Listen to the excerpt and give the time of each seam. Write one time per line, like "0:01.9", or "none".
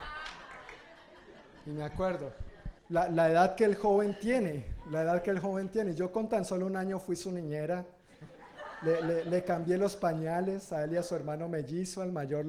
0:02.8